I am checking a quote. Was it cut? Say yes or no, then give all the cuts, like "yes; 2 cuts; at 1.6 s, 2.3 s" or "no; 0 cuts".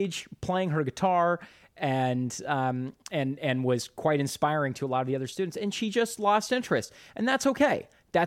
no; 0 cuts